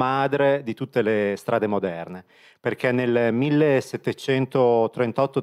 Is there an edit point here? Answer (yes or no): no